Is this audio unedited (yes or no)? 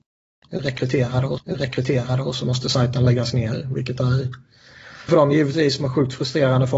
no